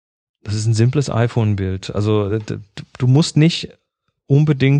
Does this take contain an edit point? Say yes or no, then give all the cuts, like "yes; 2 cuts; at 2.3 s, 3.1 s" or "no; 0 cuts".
no; 0 cuts